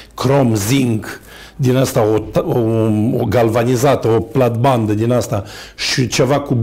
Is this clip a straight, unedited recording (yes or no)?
yes